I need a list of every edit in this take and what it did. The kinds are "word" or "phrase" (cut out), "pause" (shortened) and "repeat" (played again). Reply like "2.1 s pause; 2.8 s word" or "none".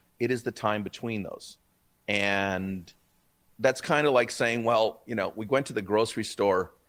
none